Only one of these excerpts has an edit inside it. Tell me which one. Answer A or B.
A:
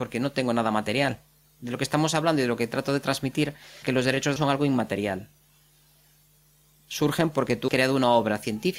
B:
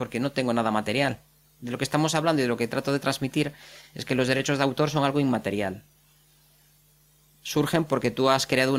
A